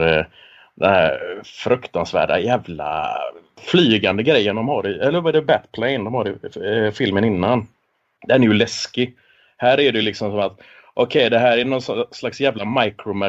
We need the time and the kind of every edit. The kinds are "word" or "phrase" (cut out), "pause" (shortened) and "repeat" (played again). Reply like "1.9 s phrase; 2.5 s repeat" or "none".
none